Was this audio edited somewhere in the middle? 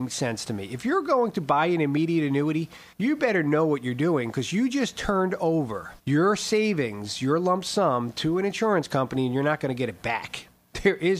yes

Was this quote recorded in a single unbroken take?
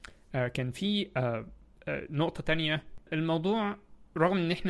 yes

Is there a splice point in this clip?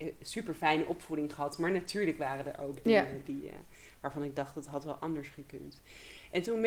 no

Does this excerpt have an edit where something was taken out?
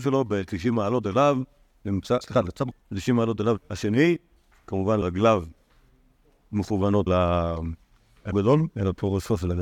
yes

